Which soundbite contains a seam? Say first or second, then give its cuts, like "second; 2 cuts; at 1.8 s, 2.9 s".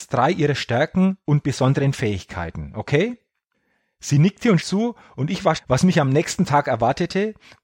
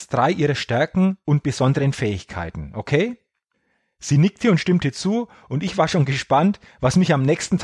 first; 2 cuts; at 4.6 s, 5.6 s